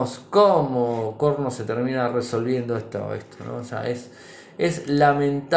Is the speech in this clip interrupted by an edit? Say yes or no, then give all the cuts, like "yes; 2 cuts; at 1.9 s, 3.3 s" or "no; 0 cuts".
no; 0 cuts